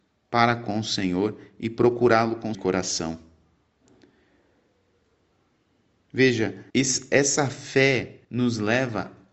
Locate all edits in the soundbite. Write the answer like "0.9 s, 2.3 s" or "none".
2.5 s, 6.7 s, 8.2 s